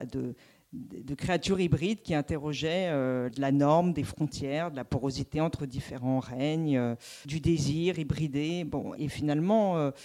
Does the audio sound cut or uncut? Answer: cut